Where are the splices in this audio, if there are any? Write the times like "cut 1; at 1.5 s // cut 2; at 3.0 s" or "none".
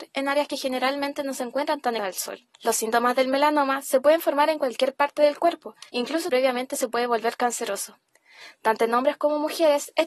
cut 1; at 2.0 s // cut 2; at 2.5 s // cut 3; at 5.9 s // cut 4; at 6.3 s